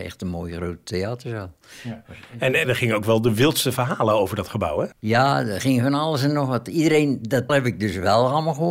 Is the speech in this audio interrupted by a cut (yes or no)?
yes